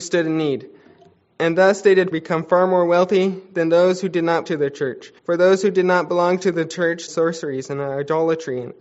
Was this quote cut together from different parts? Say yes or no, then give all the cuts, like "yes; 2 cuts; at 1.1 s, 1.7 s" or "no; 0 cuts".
yes; 4 cuts; at 2.1 s, 4.5 s, 5.2 s, 7.1 s